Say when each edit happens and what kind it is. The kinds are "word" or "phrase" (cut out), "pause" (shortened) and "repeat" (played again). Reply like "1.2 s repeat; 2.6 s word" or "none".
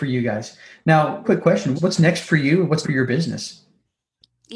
1.2 s word; 1.8 s word; 2.8 s phrase

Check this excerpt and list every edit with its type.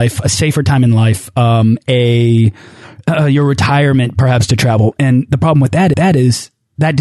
5.9 s repeat

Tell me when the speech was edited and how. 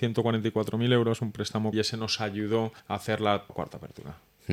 1.7 s word; 2.8 s pause; 3.5 s word

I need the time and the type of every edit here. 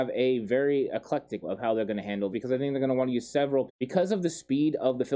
1.4 s word; 2.3 s word; 3.7 s word

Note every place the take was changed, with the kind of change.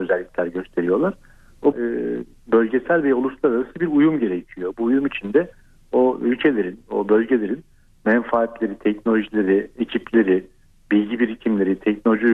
1.7 s phrase

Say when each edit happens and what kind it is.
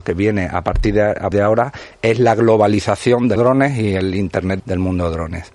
1.3 s word; 3.4 s word; 4.6 s phrase

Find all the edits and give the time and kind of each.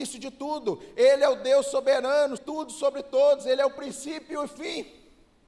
2.4 s word

